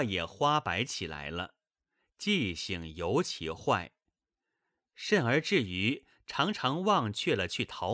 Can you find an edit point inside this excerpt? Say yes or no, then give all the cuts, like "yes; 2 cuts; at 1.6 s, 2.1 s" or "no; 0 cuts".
no; 0 cuts